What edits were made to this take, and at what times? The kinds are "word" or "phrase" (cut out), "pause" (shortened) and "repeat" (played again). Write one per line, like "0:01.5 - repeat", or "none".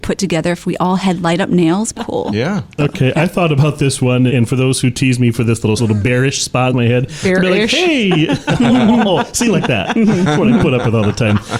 0:01.9 - word
0:04.3 - word
0:05.8 - phrase
0:06.7 - phrase